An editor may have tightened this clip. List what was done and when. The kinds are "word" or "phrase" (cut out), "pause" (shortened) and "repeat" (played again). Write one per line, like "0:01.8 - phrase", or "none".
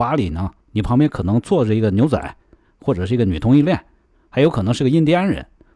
none